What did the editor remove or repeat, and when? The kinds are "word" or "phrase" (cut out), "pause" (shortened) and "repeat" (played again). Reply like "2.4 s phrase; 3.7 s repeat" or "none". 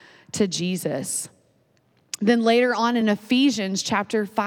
none